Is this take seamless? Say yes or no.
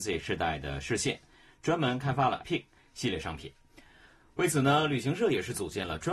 no